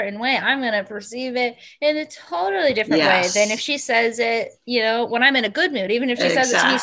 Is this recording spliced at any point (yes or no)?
no